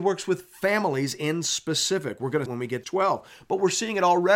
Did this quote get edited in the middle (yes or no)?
yes